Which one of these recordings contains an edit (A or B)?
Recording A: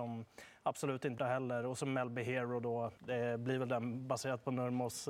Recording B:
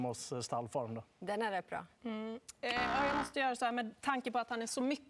A